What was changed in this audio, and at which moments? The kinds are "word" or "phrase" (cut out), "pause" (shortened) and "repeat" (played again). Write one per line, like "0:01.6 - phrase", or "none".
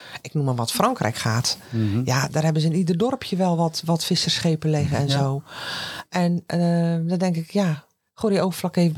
0:08.0 - pause